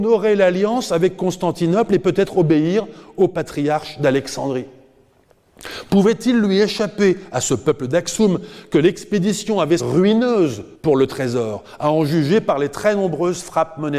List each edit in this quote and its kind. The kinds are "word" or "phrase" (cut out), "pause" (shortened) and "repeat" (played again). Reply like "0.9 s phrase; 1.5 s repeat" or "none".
9.8 s phrase; 10.7 s pause